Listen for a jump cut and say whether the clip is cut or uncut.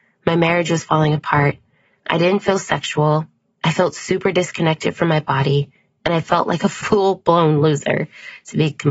uncut